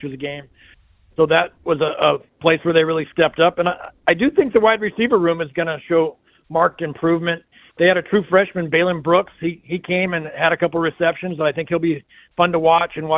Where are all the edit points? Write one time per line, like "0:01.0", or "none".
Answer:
none